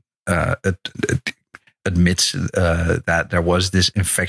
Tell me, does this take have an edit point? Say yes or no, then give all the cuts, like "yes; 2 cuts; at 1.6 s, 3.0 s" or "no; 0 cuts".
no; 0 cuts